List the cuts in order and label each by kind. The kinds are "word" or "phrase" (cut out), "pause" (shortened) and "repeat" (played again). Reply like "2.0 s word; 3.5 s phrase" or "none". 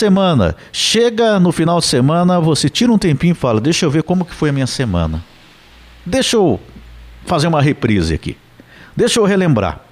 none